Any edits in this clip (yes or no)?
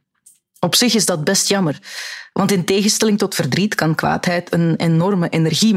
no